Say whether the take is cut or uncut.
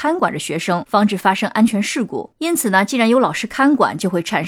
cut